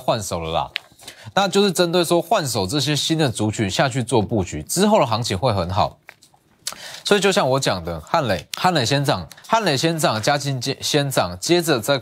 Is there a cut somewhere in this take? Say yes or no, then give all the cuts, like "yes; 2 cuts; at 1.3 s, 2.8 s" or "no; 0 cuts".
yes; 2 cuts; at 8.5 s, 9.4 s